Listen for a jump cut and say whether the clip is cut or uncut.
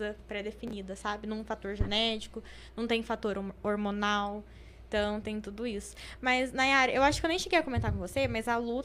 cut